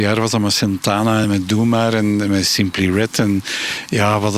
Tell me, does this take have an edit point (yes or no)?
no